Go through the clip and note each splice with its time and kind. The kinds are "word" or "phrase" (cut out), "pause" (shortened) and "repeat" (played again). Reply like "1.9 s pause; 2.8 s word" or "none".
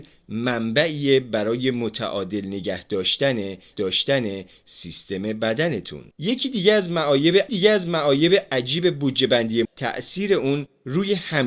3.7 s repeat; 6.1 s pause; 7.5 s repeat; 9.6 s word

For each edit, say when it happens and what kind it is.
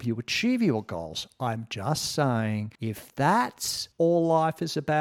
2.8 s pause; 3.9 s pause

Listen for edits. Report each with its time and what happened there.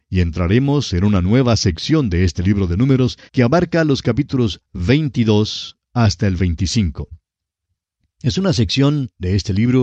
3.3 s pause

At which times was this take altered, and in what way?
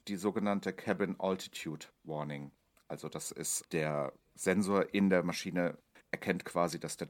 3.6 s word

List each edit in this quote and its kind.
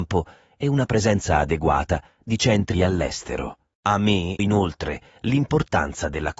2.7 s word; 4.4 s word

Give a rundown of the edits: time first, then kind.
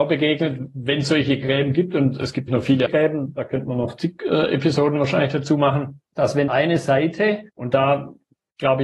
2.5 s word; 2.9 s word; 6.1 s pause; 6.5 s word; 7.5 s pause

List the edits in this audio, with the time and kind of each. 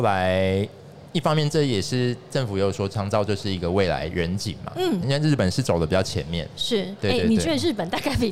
5.0 s phrase

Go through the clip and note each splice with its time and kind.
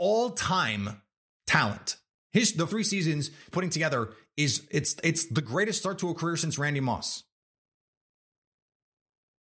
2.1 s pause; 2.7 s word; 3.5 s phrase

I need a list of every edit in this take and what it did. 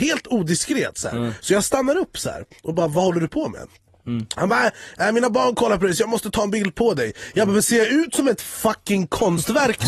none

